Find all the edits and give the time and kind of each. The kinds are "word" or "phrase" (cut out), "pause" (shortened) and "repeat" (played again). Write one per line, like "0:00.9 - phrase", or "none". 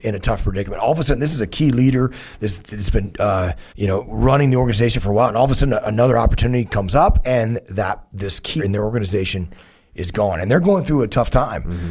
0:03.7 - pause
0:08.6 - word